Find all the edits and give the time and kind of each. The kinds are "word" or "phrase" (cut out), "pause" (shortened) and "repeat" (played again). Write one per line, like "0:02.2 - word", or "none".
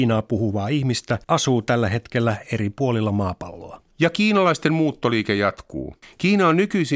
0:01.2 - pause
0:03.9 - pause
0:06.0 - pause